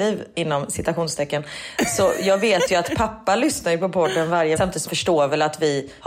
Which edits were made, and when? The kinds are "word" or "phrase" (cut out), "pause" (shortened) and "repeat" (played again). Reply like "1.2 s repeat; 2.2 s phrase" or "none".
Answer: 4.6 s word; 4.9 s word